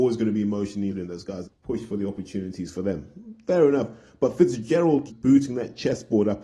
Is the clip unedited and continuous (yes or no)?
no